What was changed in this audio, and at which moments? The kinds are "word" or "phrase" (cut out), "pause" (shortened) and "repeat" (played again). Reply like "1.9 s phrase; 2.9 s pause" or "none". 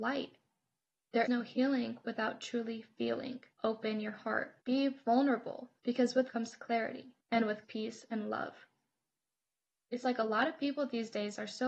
1.3 s word; 3.5 s pause; 4.6 s pause; 5.8 s pause; 6.3 s word; 7.2 s pause; 7.6 s phrase; 10.0 s word